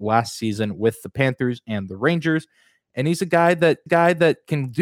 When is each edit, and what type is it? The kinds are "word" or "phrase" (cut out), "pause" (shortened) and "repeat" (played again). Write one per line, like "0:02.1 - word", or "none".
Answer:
0:03.9 - repeat